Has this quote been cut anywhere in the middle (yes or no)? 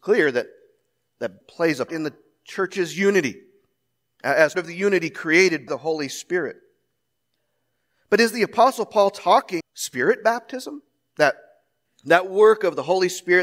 yes